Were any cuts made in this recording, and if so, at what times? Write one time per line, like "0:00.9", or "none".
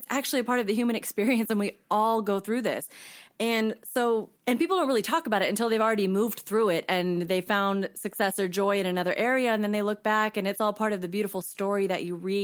0:04.4